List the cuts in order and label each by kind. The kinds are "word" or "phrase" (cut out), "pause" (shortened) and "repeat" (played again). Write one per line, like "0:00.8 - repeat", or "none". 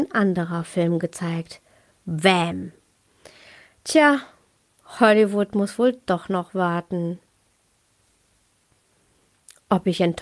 none